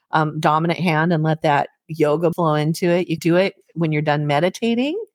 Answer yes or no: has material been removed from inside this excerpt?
yes